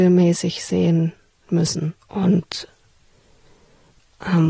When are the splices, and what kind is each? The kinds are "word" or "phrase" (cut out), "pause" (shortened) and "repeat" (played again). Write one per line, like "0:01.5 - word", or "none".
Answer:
0:02.0 - pause